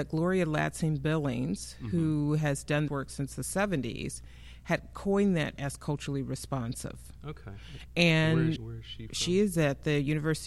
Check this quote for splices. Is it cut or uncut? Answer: cut